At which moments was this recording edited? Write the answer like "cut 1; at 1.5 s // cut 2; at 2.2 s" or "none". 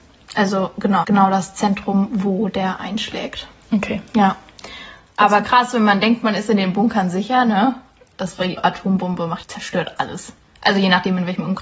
cut 1; at 1.0 s // cut 2; at 8.6 s // cut 3; at 9.4 s